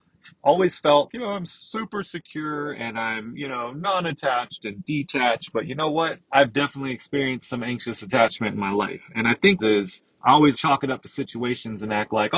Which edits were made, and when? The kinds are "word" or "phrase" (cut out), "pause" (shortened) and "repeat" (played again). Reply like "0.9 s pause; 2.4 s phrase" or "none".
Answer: 1.1 s word; 6.2 s pause; 9.6 s phrase; 10.1 s pause; 10.5 s word